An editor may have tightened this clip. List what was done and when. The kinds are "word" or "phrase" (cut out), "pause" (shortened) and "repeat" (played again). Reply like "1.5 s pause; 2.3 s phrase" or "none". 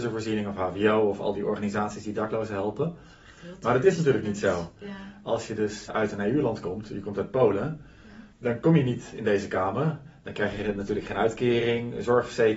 5.9 s word; 8.3 s pause

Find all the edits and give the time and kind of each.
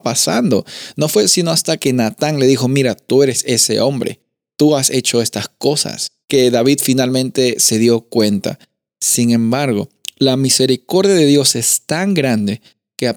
6.2 s pause

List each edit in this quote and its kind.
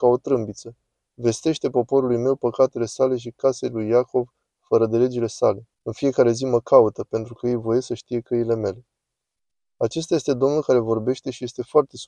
5.7 s pause

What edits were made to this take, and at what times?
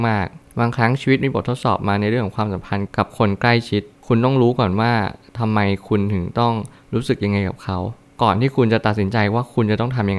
none

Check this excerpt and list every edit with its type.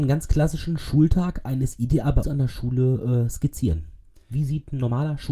2.2 s word

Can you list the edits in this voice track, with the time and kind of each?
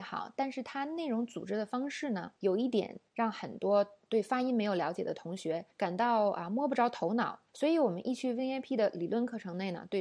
2.4 s pause; 3.1 s pause; 5.7 s pause; 7.5 s pause

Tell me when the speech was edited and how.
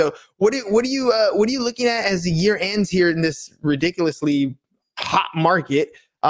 none

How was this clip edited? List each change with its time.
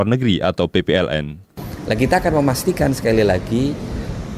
none

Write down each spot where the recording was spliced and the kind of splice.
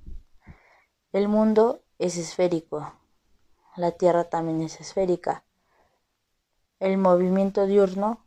none

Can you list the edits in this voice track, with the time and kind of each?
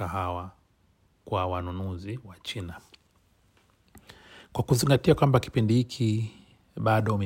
none

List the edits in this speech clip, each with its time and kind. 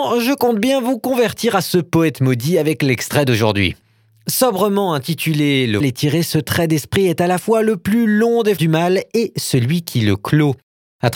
5.8 s phrase; 8.6 s word

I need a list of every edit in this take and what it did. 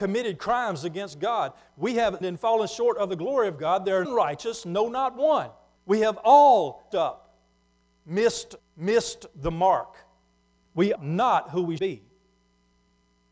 2.2 s word; 4.0 s word; 5.8 s pause; 6.9 s word; 8.6 s repeat; 10.9 s word; 11.8 s word

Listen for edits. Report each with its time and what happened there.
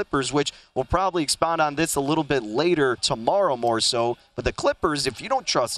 3.0 s word

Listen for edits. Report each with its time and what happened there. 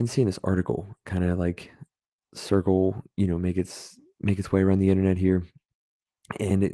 none

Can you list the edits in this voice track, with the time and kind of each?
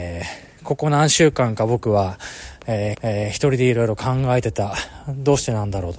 2.9 s repeat

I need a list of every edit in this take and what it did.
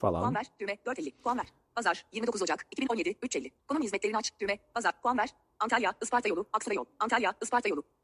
3.6 s pause

